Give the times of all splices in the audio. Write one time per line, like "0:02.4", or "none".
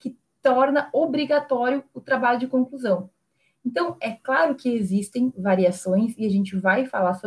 none